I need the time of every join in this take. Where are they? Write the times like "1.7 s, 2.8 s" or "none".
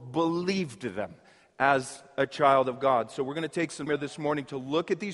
3.9 s